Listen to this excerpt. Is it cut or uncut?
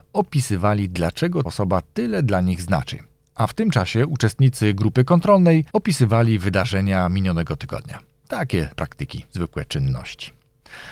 cut